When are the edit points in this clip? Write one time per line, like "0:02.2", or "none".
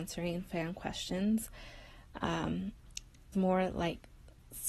0:03.3